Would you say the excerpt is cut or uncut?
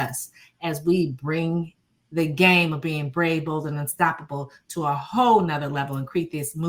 uncut